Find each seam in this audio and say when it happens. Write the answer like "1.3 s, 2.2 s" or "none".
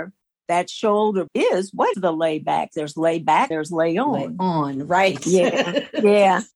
1.3 s, 1.9 s, 3.5 s